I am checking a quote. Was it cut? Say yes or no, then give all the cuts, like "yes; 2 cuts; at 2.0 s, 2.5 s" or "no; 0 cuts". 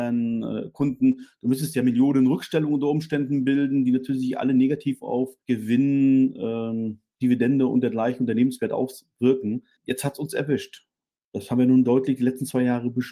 yes; 2 cuts; at 5.4 s, 9.8 s